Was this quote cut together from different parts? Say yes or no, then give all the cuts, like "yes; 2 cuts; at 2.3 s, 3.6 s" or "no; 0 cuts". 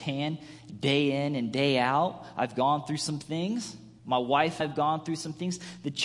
yes; 2 cuts; at 4.0 s, 4.6 s